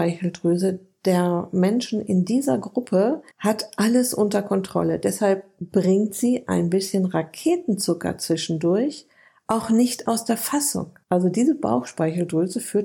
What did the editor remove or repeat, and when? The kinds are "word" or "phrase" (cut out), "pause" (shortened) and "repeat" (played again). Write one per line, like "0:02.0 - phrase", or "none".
0:03.3 - pause
0:11.0 - pause